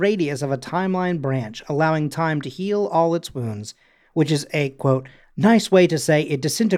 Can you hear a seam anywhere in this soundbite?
no; 0 cuts

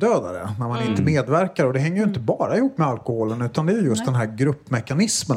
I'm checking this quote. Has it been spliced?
no; 0 cuts

